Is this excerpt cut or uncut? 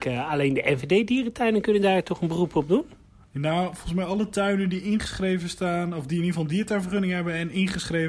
uncut